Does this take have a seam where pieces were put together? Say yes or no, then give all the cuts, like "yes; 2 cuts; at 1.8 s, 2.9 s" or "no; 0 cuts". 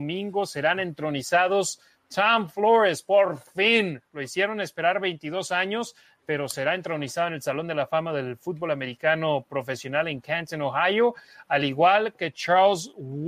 no; 0 cuts